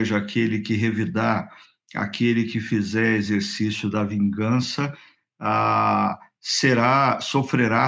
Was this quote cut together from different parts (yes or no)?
no